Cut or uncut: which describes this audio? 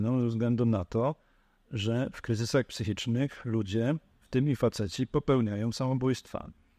uncut